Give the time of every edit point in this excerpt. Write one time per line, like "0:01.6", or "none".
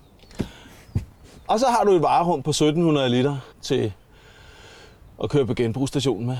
0:03.5